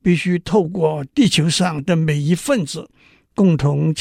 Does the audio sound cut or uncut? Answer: uncut